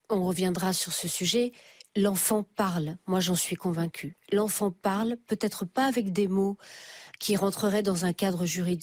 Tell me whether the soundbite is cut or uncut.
cut